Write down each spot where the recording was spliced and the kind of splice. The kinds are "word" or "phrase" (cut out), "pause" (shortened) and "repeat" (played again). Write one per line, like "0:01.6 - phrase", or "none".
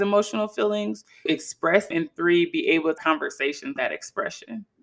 0:01.3 - word
0:01.9 - word
0:03.0 - word
0:03.8 - word